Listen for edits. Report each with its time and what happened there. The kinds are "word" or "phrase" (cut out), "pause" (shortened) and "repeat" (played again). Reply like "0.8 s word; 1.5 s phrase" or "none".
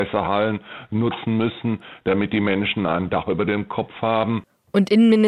none